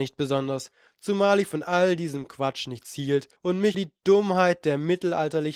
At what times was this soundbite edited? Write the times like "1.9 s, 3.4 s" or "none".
3.4 s, 3.7 s